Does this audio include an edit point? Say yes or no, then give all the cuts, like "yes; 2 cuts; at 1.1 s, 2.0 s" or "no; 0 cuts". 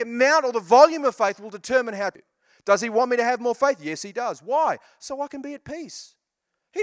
no; 0 cuts